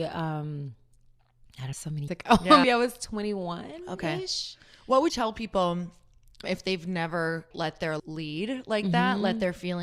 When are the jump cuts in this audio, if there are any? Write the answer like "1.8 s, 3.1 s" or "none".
1.7 s, 2.1 s, 2.6 s, 5.1 s, 6.4 s, 7.5 s, 8.0 s